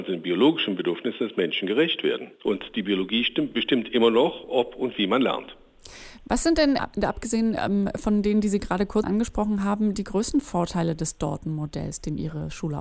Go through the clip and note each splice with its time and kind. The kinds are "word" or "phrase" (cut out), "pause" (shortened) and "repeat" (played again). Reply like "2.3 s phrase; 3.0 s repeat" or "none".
2.4 s pause; 9.0 s word